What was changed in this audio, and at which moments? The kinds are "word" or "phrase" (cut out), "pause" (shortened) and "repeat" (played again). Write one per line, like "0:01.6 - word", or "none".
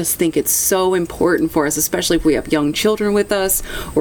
none